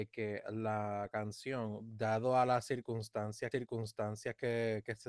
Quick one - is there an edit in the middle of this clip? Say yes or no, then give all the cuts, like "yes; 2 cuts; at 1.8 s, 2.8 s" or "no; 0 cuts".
yes; 1 cut; at 3.5 s